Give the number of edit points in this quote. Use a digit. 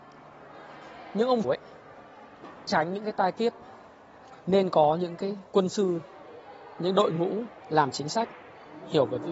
4